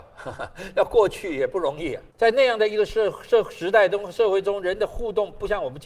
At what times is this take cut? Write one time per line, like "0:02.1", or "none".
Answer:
0:02.1